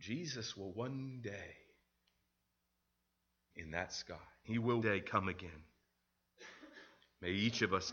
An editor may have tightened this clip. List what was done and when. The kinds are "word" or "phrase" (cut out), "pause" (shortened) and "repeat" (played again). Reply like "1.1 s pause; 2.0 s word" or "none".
3.5 s word; 4.4 s word; 4.8 s word